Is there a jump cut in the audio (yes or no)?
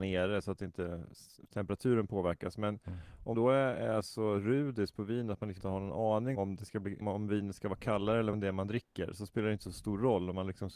yes